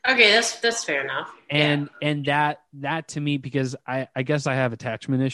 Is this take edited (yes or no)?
no